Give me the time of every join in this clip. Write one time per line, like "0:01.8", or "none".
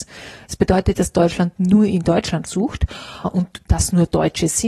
0:01.0
0:02.5
0:03.2